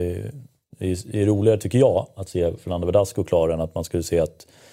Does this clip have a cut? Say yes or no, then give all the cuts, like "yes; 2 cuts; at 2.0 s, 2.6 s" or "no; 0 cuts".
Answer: no; 0 cuts